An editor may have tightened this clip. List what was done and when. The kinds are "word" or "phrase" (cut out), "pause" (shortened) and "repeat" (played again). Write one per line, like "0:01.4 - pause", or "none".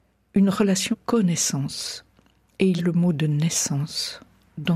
0:00.9 - word
0:02.8 - word